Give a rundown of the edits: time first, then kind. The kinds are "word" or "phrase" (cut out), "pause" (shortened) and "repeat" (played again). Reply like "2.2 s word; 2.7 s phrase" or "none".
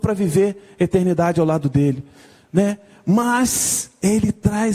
none